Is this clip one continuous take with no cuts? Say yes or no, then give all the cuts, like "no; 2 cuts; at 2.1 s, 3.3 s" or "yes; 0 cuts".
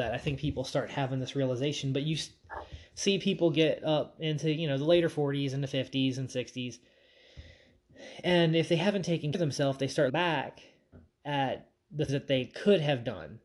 no; 3 cuts; at 9.3 s, 10.1 s, 12.1 s